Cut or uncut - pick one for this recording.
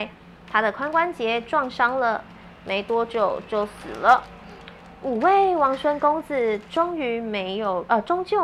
uncut